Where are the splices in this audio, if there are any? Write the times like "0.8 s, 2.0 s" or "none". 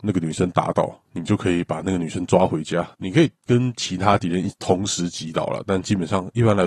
2.9 s